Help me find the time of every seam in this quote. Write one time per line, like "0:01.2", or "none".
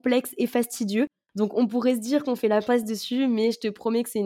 none